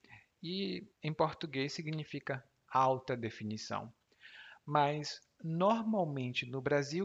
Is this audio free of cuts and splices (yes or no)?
no